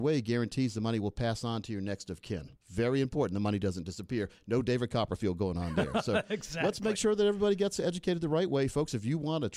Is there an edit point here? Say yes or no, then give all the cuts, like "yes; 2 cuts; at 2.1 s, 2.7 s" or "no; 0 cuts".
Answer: yes; 1 cut; at 2.6 s